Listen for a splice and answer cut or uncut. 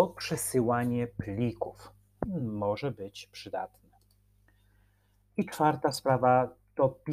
uncut